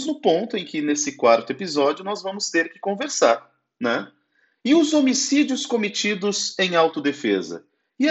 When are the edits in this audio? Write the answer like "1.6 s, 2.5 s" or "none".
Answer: none